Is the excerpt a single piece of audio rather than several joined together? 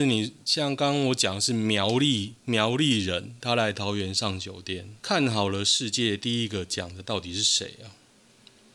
no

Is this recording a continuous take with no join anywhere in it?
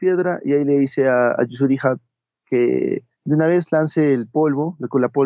no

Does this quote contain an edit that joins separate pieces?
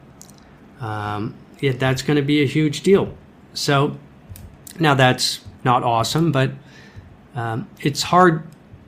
yes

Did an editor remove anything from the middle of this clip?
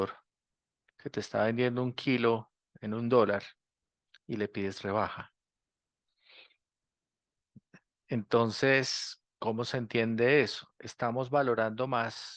no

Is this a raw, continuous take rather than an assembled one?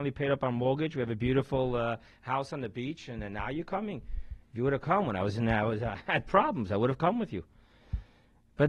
yes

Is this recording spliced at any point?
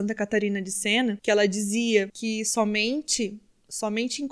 no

